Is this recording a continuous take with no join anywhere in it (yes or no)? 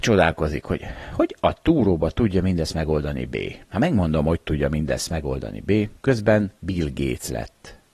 no